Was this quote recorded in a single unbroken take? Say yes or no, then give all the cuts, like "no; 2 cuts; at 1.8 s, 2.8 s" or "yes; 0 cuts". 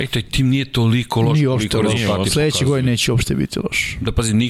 yes; 0 cuts